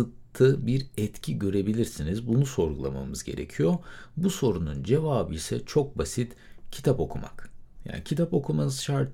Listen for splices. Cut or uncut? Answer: uncut